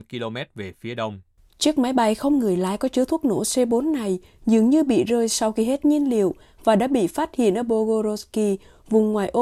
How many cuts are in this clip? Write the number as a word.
zero